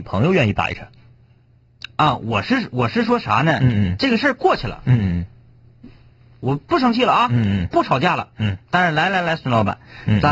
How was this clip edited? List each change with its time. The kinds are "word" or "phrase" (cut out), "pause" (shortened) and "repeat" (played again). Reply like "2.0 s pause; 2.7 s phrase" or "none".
none